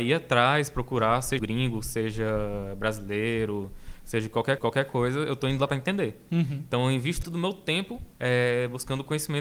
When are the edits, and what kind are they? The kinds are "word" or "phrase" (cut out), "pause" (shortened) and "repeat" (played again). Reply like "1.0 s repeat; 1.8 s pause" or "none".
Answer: 1.4 s word; 4.6 s repeat; 5.7 s word; 7.2 s word; 8.1 s pause